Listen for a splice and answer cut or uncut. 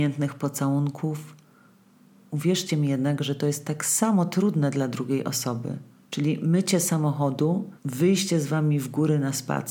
cut